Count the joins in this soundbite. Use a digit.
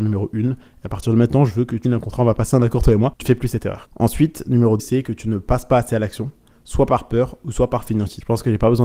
3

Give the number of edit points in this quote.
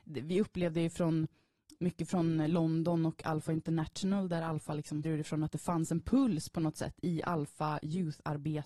1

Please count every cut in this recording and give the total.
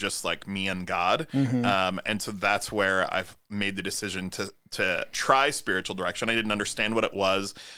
1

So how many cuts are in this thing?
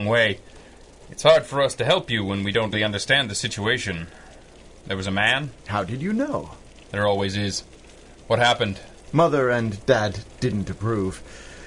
1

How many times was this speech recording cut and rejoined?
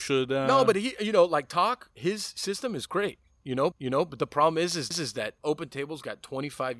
2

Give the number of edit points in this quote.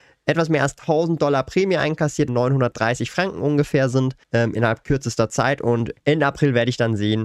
2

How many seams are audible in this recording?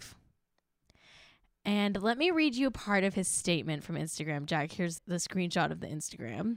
1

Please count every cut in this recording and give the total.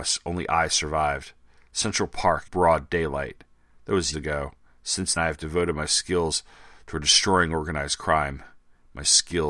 3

